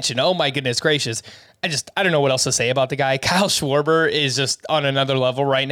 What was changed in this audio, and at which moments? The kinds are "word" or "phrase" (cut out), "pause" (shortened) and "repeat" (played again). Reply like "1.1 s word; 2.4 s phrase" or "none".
none